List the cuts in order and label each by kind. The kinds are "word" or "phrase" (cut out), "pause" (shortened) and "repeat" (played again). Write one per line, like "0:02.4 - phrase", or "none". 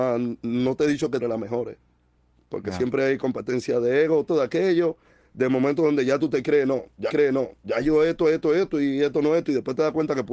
0:01.2 - phrase
0:04.3 - phrase
0:07.1 - repeat